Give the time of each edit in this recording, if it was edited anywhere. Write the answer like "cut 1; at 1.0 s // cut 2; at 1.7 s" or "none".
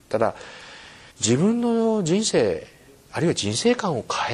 cut 1; at 1.1 s